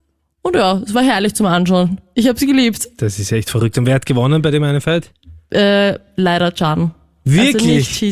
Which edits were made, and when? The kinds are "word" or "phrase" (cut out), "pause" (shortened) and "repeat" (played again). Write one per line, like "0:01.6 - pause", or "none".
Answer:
none